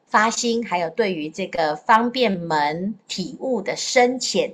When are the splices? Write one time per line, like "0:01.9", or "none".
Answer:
0:03.0